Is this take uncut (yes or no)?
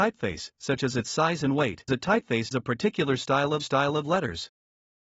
no